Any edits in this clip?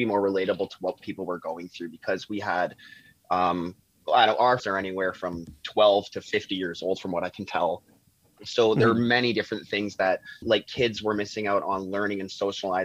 yes; 2 cuts; at 4.6 s, 10.4 s

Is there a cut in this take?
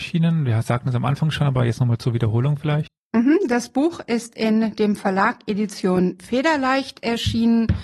no; 0 cuts

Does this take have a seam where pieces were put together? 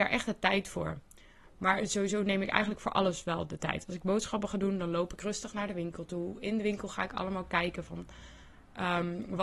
no; 0 cuts

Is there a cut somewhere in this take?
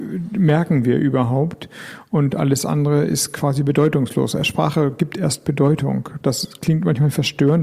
no; 0 cuts

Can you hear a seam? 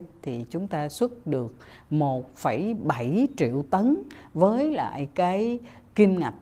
no; 0 cuts

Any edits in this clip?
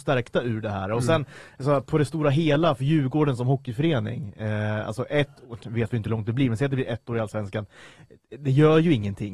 no; 0 cuts

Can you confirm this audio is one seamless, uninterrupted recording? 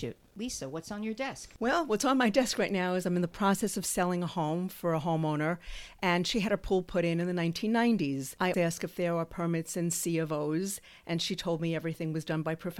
no; 1 cut; at 8.5 s

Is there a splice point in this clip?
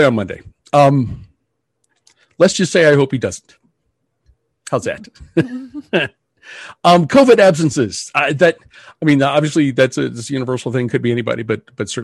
no; 0 cuts

